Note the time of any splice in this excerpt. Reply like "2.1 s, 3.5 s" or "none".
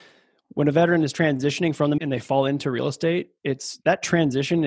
2.0 s